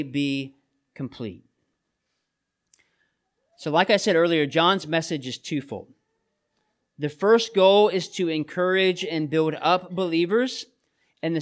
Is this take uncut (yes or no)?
yes